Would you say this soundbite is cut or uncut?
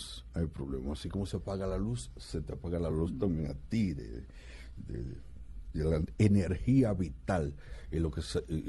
uncut